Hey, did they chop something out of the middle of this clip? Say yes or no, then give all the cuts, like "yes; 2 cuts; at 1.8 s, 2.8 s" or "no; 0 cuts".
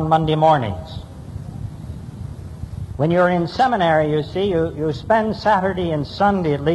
no; 0 cuts